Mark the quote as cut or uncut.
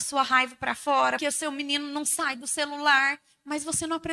cut